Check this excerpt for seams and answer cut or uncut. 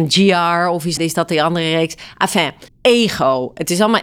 cut